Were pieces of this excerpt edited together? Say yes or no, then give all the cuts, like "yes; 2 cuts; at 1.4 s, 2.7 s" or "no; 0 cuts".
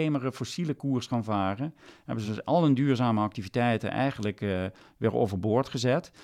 no; 0 cuts